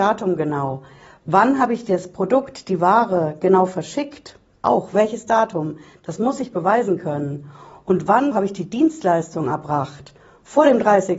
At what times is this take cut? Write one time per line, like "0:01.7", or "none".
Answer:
0:08.3